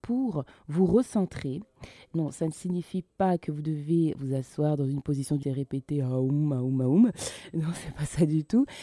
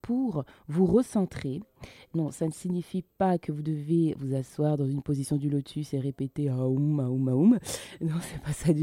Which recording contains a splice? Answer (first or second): first